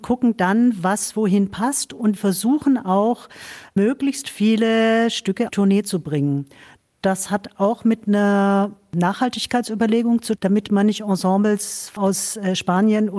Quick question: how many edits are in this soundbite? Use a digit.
4